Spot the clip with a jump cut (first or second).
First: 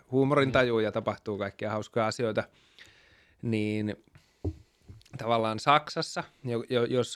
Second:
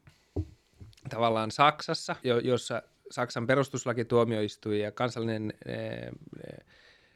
second